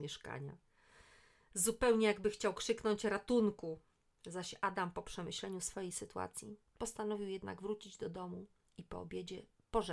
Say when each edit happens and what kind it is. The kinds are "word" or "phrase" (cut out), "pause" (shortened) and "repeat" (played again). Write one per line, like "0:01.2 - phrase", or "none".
none